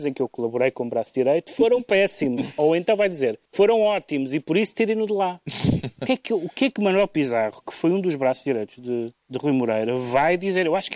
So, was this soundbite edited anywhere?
yes; 2 cuts; at 3.4 s, 9.2 s

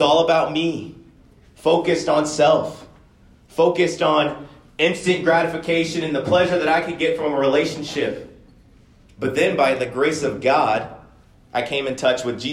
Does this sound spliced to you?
no; 0 cuts

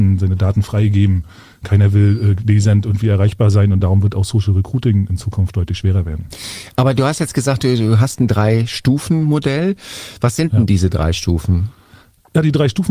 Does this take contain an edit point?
no; 0 cuts

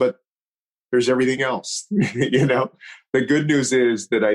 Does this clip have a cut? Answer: no; 0 cuts

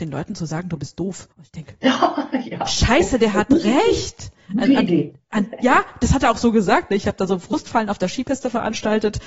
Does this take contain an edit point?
yes; 1 cut; at 1.3 s

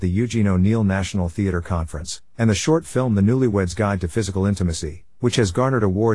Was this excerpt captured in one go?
yes; 0 cuts

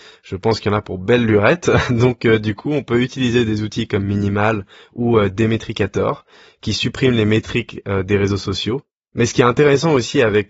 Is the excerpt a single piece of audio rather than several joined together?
yes; 0 cuts

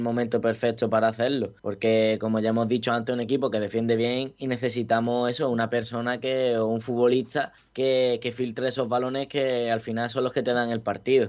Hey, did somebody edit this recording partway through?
yes; 2 cuts; at 1.6 s, 7.6 s

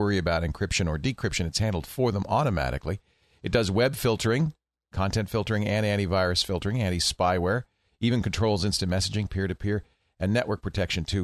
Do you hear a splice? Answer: no; 0 cuts

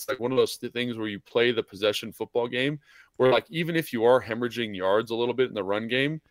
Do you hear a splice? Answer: no; 0 cuts

